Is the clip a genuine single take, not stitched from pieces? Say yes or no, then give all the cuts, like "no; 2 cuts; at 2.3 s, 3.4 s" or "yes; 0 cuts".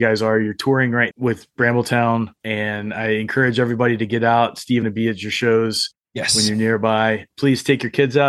no; 3 cuts; at 1.1 s, 2.4 s, 4.8 s